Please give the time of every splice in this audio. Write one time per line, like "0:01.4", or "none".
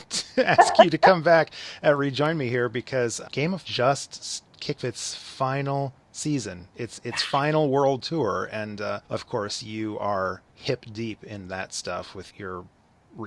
0:03.2
0:03.6
0:04.8
0:09.0
0:10.5
0:12.3